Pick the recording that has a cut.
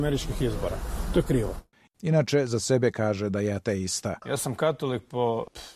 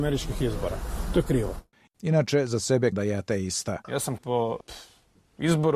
second; 2 cuts; at 2.9 s, 4.2 s

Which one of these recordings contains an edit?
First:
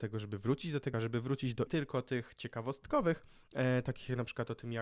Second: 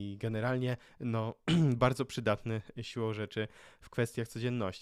first; 2 cuts; at 0.9 s, 1.7 s

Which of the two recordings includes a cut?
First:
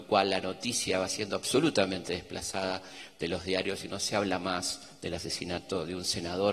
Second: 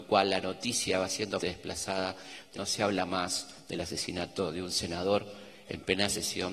second; 2 cuts; at 1.4 s, 2.5 s

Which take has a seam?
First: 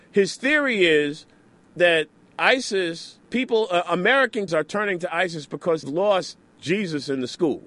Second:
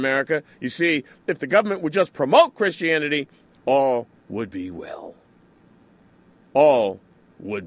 first; 3 cuts; at 3.2 s, 4.5 s, 5.8 s

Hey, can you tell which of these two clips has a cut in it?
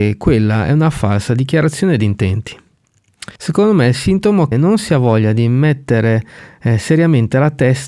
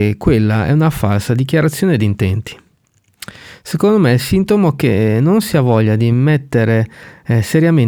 first; 2 cuts; at 3.3 s, 4.5 s

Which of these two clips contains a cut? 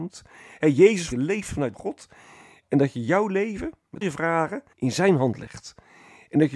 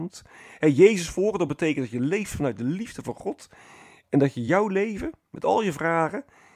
first; 4 cuts; at 1.1 s, 1.7 s, 4.0 s, 4.7 s

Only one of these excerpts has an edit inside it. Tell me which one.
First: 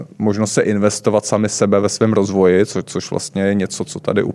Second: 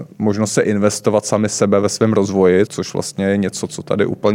second; 1 cut; at 2.7 s

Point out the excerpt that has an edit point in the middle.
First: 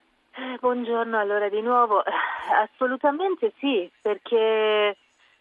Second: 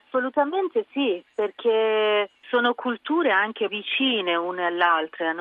second; 2 cuts; at 2.4 s, 3.7 s

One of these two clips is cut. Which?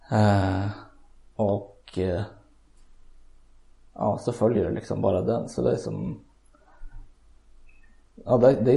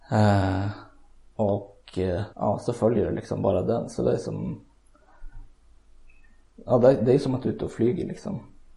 second; 1 cut; at 2.3 s

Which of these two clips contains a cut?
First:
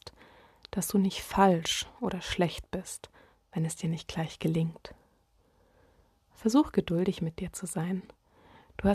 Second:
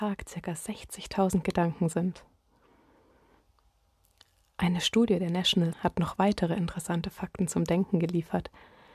second; 1 cut; at 5.7 s

